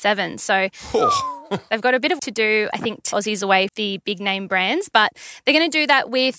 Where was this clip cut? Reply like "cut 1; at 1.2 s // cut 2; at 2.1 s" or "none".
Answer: cut 1; at 2.2 s // cut 2; at 2.7 s // cut 3; at 3.1 s // cut 4; at 3.7 s